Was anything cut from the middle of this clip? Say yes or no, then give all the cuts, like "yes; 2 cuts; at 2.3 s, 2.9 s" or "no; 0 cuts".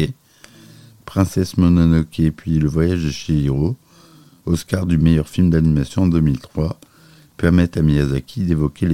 no; 0 cuts